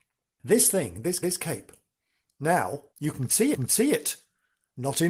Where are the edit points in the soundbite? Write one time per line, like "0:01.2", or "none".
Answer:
0:01.2
0:02.9
0:03.5